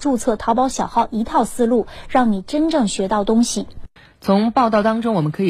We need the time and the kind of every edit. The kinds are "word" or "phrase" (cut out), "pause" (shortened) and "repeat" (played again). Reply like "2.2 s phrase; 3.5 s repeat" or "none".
4.0 s pause